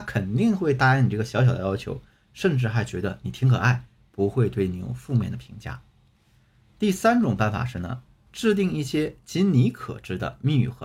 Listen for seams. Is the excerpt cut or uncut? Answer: uncut